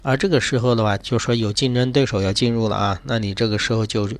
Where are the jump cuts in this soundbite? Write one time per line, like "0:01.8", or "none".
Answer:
none